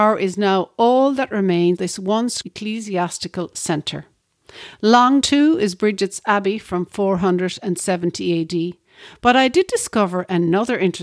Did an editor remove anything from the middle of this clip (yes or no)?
yes